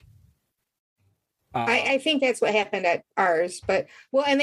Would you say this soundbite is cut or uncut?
cut